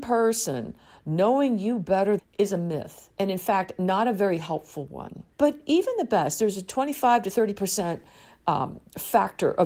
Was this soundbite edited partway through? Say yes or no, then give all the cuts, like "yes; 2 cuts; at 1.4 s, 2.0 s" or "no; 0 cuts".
yes; 2 cuts; at 2.2 s, 5.3 s